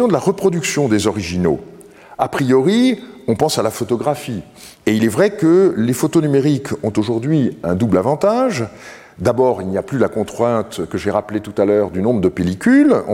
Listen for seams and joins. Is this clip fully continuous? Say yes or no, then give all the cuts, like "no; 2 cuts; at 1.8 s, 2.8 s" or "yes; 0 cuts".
no; 1 cut; at 4.7 s